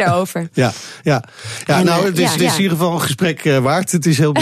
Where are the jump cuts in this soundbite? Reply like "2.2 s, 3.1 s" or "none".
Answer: 2.3 s